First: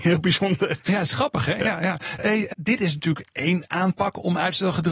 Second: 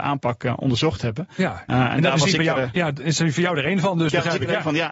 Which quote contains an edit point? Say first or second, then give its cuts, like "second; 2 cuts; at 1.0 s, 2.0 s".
first; 2 cuts; at 2.2 s, 2.5 s